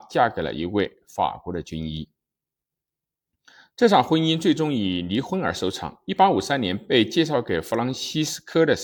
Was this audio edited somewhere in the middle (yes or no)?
no